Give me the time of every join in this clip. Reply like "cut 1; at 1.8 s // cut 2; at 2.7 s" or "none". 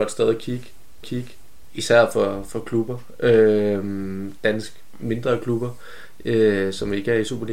cut 1; at 1.0 s